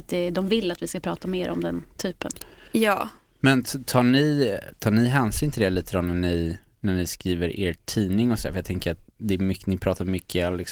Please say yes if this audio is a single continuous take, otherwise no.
yes